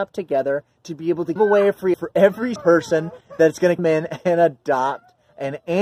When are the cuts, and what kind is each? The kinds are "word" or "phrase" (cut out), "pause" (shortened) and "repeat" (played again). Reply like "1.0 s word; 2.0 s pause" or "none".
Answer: 1.4 s word; 1.9 s word; 2.6 s word; 3.8 s word